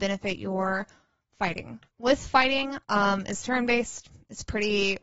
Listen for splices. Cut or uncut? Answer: cut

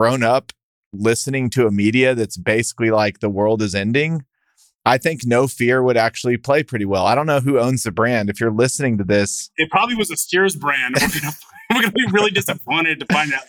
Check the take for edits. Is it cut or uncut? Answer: uncut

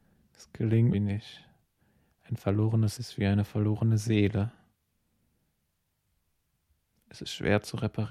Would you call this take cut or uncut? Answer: cut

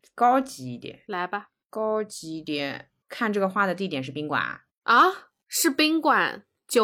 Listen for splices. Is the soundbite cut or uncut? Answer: cut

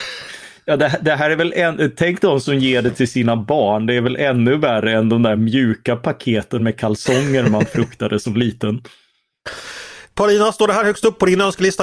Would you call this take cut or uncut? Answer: uncut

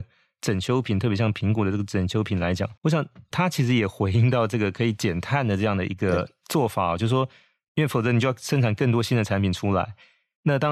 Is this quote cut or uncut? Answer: cut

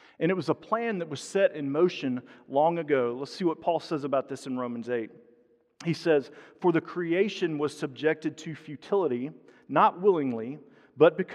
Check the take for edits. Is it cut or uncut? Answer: uncut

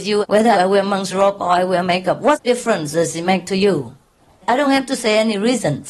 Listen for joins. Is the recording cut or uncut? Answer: uncut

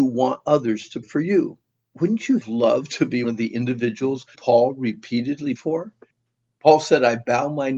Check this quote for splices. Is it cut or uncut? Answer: cut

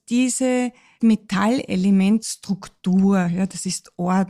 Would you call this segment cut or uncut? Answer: cut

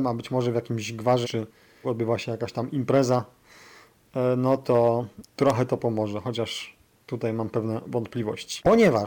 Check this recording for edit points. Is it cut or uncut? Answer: cut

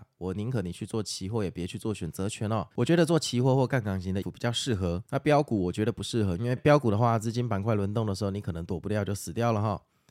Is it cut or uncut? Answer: cut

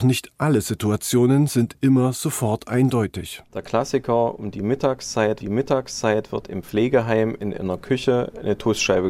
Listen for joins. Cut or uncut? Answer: cut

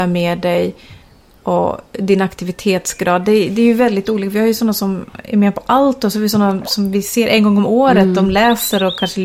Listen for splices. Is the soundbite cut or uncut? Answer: uncut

